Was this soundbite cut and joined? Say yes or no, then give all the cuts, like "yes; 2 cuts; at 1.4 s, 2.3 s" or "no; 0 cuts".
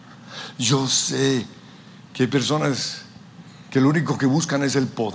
no; 0 cuts